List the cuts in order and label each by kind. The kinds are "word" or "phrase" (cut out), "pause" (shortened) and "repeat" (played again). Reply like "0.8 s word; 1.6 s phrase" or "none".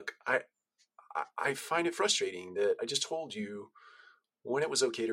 none